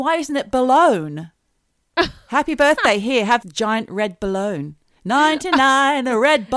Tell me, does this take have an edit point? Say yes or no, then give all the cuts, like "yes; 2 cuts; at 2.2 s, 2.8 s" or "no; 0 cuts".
yes; 2 cuts; at 1.4 s, 3.4 s